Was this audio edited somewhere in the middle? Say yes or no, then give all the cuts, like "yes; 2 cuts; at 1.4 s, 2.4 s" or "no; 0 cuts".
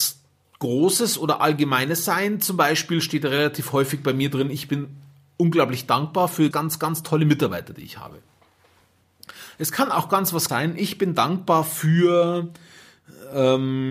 yes; 2 cuts; at 6.5 s, 10.5 s